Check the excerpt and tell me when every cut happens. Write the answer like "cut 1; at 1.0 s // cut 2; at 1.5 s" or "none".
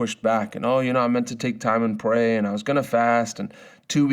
none